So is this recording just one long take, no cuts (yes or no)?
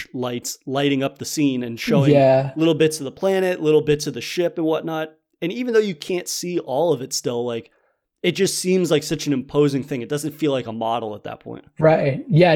yes